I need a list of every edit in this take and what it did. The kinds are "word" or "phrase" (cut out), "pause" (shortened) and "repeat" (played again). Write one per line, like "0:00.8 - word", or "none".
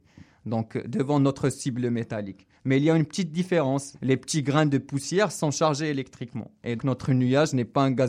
0:02.6 - pause
0:06.8 - word